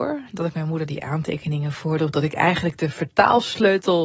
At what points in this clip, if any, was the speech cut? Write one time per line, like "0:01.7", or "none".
none